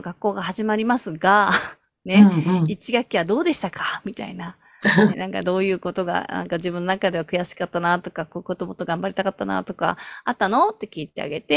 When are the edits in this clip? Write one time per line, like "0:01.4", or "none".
0:05.1